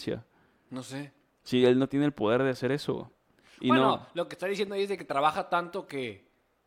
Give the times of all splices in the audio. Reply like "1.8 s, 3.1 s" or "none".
none